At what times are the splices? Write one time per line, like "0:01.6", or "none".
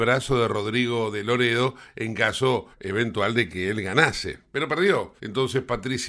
0:02.7
0:05.2